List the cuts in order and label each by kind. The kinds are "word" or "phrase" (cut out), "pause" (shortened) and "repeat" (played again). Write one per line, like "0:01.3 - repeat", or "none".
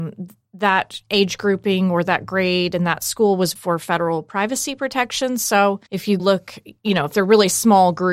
0:03.6 - word
0:05.9 - pause
0:06.2 - word